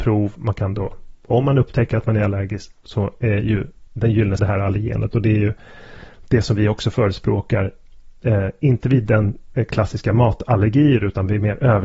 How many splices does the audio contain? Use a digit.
2